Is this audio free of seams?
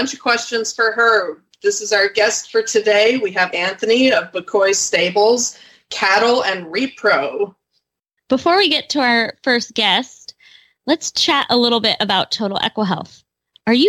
no; 1 cut; at 3.5 s

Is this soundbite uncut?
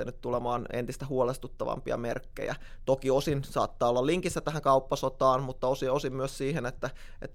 yes; 0 cuts

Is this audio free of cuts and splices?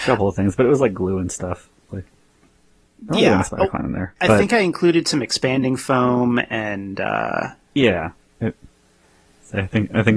yes; 0 cuts

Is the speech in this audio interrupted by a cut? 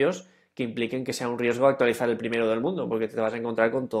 no; 0 cuts

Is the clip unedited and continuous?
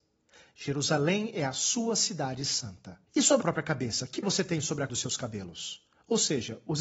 no; 4 cuts; at 3.1 s, 3.4 s, 4.2 s, 4.9 s

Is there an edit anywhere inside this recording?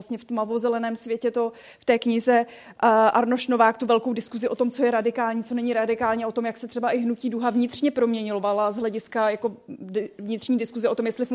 no; 0 cuts

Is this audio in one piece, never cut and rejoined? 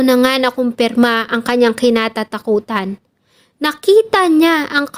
yes; 0 cuts

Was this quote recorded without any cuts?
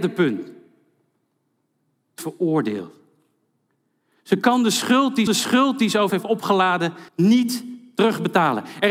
no; 4 cuts; at 2.2 s, 5.3 s, 6.1 s, 7.1 s

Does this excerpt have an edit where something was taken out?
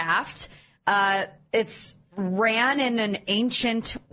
no; 0 cuts

